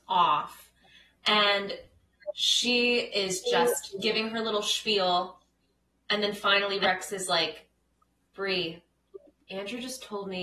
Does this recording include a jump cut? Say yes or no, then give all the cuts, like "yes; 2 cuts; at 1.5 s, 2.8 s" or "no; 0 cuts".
no; 0 cuts